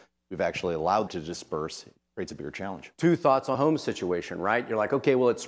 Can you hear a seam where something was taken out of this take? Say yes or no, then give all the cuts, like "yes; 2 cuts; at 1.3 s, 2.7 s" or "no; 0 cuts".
yes; 3 cuts; at 1.1 s, 2.0 s, 3.5 s